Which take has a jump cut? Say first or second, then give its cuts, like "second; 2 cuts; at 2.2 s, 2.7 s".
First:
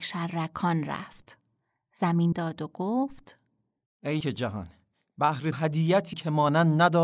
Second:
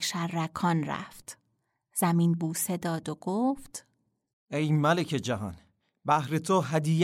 first; 4 cuts; at 2.3 s, 4.2 s, 5.5 s, 6.1 s